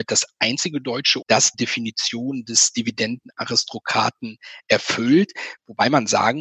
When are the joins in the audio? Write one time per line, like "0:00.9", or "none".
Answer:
0:01.2
0:01.5